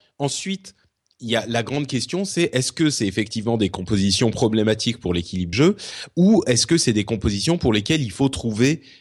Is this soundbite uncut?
no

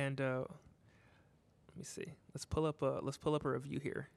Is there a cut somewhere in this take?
no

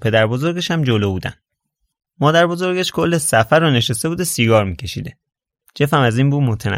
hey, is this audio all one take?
yes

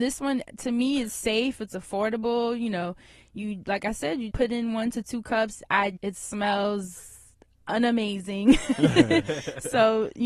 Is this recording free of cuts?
no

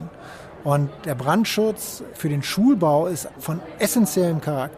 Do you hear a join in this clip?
no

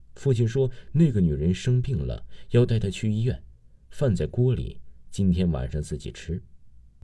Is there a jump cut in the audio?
no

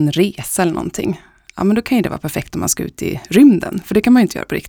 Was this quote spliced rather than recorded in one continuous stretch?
no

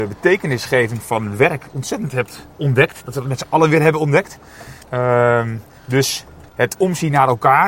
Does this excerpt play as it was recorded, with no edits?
no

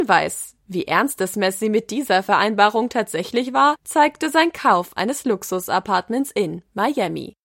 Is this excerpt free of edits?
yes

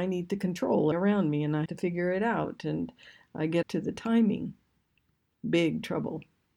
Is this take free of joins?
no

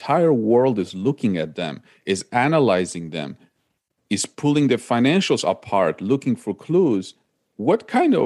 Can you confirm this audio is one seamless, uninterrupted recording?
yes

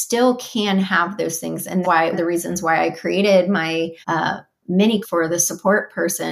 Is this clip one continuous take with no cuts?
no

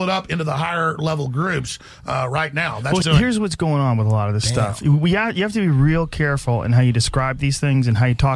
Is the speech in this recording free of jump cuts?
no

